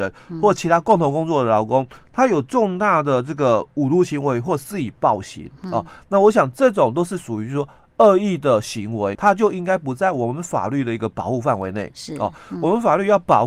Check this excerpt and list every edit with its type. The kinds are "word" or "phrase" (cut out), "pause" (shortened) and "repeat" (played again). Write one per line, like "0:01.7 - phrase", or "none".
0:09.1 - word